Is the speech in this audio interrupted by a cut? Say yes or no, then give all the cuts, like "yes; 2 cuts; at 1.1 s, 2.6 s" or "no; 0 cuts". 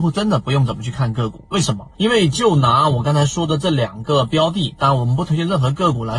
yes; 1 cut; at 1.9 s